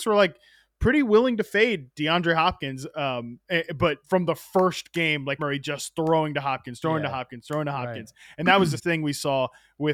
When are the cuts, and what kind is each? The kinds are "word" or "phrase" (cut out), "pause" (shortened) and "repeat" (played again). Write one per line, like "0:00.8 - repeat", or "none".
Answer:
0:04.0 - word
0:05.4 - word
0:08.8 - word